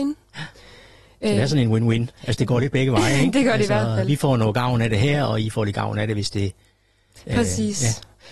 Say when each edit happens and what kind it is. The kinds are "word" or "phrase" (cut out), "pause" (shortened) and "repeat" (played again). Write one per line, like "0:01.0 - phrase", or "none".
none